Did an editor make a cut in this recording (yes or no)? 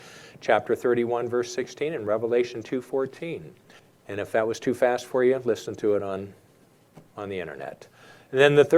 yes